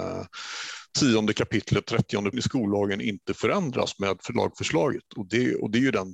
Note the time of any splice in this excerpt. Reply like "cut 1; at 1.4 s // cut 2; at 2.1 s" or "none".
cut 1; at 2.3 s